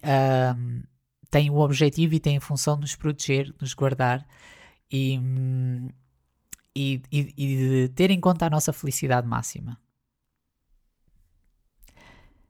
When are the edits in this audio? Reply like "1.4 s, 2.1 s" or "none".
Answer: none